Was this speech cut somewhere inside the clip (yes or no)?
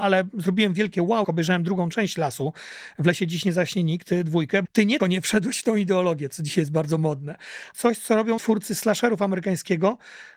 yes